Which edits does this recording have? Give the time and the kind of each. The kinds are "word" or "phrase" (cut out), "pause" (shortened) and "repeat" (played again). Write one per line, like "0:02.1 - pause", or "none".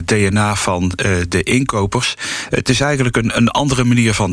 none